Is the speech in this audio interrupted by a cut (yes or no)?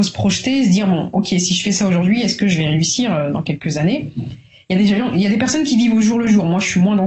no